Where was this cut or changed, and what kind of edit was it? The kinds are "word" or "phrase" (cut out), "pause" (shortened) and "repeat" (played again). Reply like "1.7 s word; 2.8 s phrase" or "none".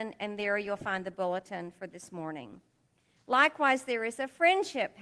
none

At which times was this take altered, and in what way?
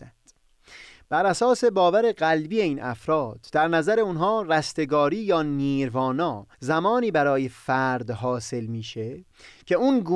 6.5 s pause

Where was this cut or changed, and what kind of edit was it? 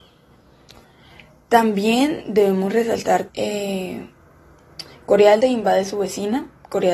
3.3 s word; 5.4 s word

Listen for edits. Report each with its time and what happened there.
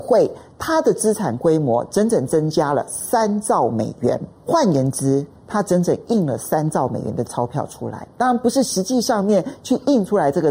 4.4 s pause

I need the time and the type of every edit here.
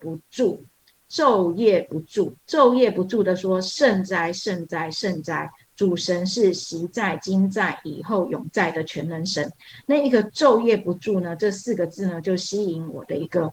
2.4 s pause

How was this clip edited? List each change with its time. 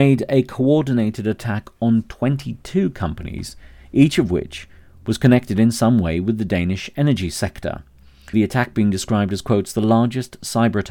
8.3 s word

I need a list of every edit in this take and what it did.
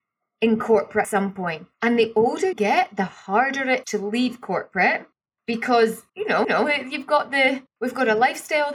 1.0 s word; 1.7 s pause; 2.5 s word; 3.8 s word; 6.1 s pause; 6.4 s repeat; 7.7 s pause

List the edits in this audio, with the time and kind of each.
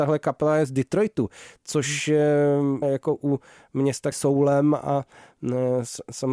2.8 s word; 4.1 s phrase

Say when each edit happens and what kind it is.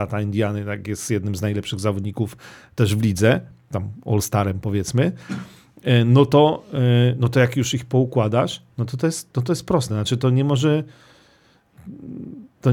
none

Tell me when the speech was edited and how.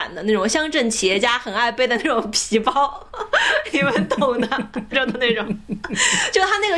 4.9 s word

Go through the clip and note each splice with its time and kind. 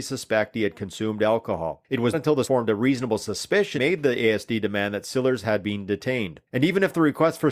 2.1 s word; 2.4 s word; 3.8 s word; 6.5 s pause

